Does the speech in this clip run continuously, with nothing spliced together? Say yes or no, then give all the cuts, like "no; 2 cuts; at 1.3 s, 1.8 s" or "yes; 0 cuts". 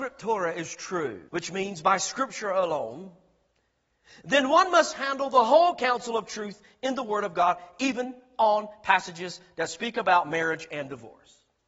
no; 1 cut; at 1.3 s